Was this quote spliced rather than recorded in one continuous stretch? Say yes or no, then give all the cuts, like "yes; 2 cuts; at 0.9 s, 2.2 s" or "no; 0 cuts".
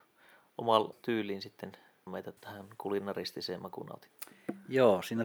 yes; 3 cuts; at 0.9 s, 2.1 s, 2.4 s